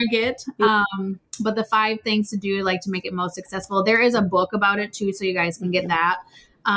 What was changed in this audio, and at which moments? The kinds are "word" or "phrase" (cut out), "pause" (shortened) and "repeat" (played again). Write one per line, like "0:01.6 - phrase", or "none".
none